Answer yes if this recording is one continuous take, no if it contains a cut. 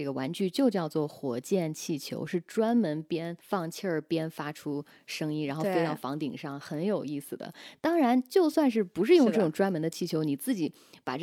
no